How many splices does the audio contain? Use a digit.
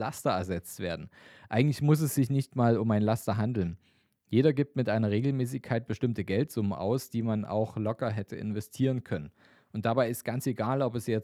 0